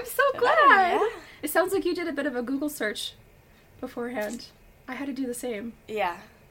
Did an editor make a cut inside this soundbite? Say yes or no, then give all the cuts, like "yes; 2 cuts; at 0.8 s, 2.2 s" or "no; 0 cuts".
no; 0 cuts